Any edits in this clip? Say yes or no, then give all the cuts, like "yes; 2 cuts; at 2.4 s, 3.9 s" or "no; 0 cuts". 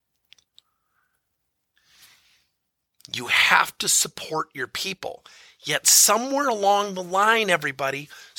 no; 0 cuts